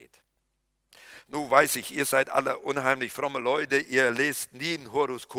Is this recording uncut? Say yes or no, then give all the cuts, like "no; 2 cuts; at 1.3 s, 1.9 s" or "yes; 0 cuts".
yes; 0 cuts